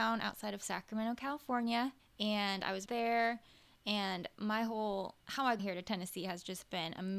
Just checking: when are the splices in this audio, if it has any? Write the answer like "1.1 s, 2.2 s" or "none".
2.0 s, 2.9 s, 5.2 s, 5.6 s